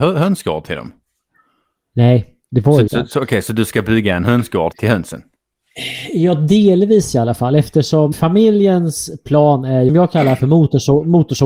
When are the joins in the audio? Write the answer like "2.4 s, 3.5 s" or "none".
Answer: 2.9 s, 4.7 s, 8.1 s, 9.9 s

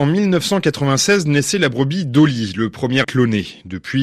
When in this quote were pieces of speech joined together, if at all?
3.0 s

